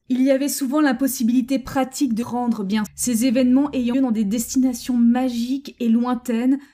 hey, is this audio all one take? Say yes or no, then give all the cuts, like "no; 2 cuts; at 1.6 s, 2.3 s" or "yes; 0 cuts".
no; 3 cuts; at 2.2 s, 2.9 s, 3.9 s